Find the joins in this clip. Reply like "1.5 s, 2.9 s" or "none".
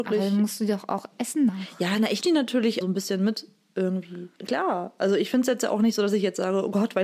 1.5 s, 2.2 s, 2.8 s, 4.4 s